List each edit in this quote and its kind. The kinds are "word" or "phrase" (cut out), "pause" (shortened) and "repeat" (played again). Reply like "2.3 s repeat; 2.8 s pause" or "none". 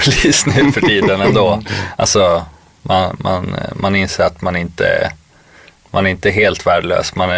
none